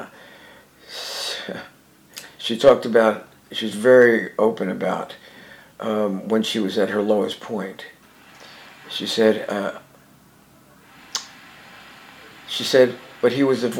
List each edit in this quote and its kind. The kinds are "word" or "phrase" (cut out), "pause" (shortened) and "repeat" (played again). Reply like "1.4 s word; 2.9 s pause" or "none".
none